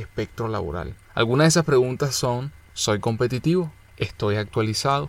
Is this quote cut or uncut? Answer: uncut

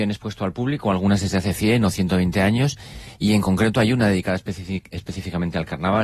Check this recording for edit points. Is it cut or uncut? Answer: uncut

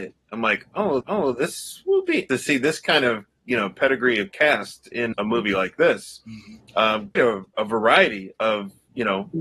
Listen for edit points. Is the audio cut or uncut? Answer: cut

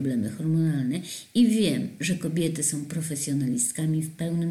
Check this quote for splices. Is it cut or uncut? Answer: uncut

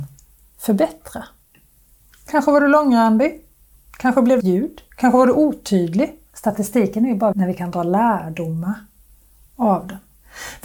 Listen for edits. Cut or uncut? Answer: cut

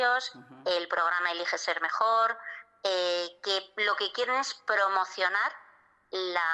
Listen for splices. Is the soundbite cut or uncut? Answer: uncut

